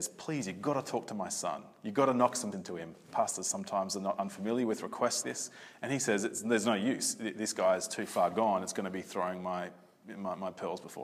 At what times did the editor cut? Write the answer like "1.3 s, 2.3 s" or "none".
2.5 s, 5.2 s